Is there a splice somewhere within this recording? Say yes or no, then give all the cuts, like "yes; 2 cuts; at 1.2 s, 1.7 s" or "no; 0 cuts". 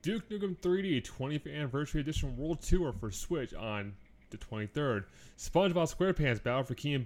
no; 0 cuts